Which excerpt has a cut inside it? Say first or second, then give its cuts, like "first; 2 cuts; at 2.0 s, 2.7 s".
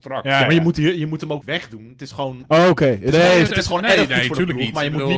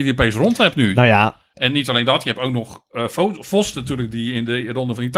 first; 2 cuts; at 1.4 s, 3.5 s